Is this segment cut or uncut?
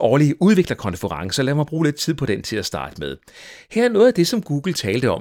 uncut